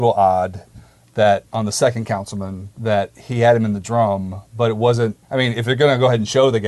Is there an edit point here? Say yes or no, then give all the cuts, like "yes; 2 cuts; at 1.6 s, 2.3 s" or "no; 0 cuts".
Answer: yes; 3 cuts; at 1.5 s, 2.7 s, 5.2 s